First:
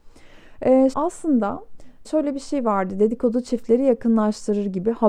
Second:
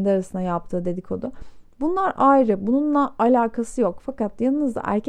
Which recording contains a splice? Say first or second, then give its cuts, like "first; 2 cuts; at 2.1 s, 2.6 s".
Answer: first; 2 cuts; at 0.9 s, 2.0 s